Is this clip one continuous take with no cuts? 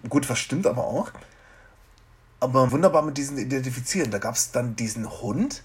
no; 1 cut; at 2.7 s

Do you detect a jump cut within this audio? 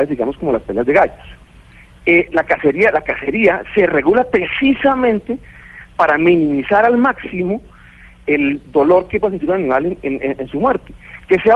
no; 0 cuts

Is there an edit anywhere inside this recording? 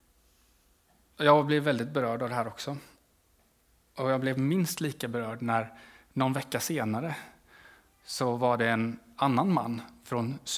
no; 0 cuts

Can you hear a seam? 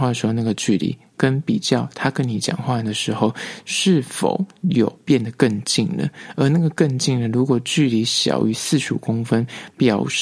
yes; 1 cut; at 4.6 s

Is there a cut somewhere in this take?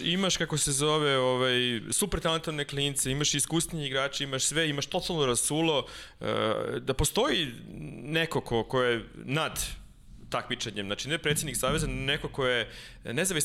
no; 0 cuts

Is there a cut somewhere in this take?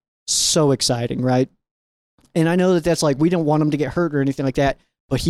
no; 0 cuts

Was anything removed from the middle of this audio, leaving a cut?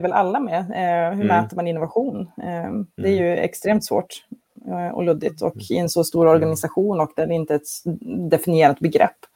no; 0 cuts

